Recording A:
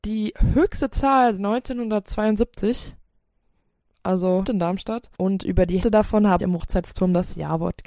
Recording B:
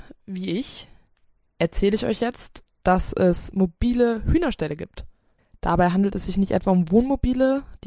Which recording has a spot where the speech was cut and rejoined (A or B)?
A